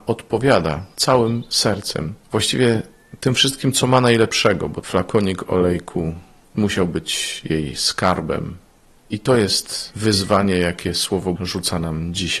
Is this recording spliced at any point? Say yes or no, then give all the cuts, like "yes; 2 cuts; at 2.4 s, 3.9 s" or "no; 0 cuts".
yes; 2 cuts; at 4.8 s, 11.4 s